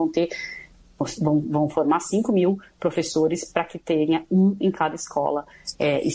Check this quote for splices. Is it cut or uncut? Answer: uncut